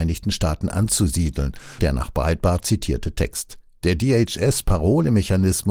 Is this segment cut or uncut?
cut